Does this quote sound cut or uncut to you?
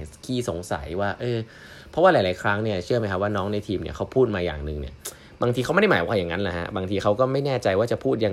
uncut